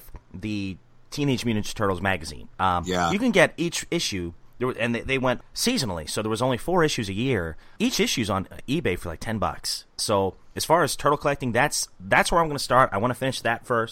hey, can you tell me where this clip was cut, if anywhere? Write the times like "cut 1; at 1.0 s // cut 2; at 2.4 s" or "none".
cut 1; at 2.5 s